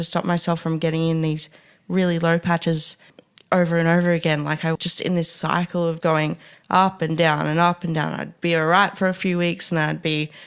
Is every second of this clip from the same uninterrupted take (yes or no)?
no